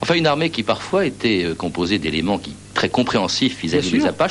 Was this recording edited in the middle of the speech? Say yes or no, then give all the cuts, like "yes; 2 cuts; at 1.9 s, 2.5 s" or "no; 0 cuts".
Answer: no; 0 cuts